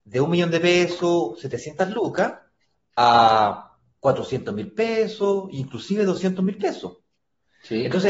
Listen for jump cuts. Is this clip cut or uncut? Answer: uncut